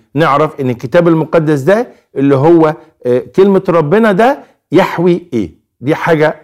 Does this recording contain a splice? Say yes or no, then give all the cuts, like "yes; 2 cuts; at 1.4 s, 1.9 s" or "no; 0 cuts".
no; 0 cuts